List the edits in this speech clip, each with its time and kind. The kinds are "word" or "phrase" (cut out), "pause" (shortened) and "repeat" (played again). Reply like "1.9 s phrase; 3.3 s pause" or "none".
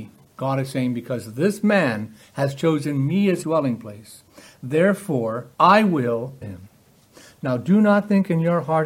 3.4 s word; 5.5 s pause; 6.4 s word